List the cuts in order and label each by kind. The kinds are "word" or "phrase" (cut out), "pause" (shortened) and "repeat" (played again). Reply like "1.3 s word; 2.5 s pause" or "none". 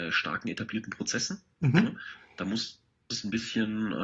none